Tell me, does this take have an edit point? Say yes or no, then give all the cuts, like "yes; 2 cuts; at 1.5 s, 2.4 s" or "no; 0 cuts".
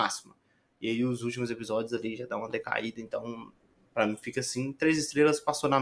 no; 0 cuts